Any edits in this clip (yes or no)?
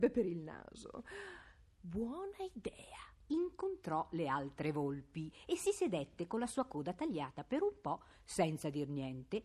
no